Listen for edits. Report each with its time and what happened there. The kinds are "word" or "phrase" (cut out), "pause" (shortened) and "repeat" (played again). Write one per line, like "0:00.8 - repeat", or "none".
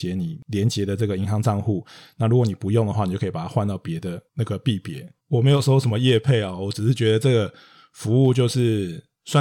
none